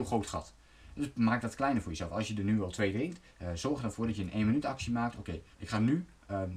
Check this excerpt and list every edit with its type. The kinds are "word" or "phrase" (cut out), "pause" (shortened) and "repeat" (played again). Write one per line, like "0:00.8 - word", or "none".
0:05.5 - pause